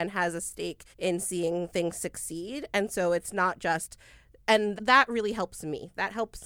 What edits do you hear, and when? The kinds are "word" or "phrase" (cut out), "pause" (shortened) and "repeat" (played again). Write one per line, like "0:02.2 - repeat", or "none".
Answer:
0:00.9 - pause
0:04.8 - word